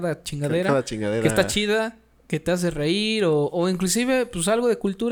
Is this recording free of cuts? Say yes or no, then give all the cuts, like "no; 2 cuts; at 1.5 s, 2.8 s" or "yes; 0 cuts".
yes; 0 cuts